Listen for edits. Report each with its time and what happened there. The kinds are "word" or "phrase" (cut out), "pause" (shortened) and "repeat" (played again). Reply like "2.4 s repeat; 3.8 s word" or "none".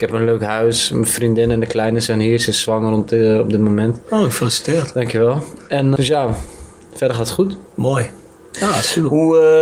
6.0 s word